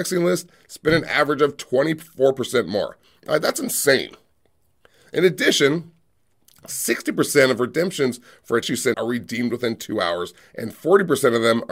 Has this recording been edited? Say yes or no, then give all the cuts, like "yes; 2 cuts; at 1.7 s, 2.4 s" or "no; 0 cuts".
yes; 2 cuts; at 8.6 s, 8.9 s